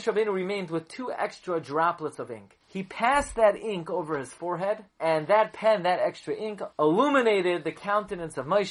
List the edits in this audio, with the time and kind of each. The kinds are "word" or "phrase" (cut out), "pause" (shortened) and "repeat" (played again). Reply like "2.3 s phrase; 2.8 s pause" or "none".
2.6 s pause; 4.9 s pause; 6.7 s pause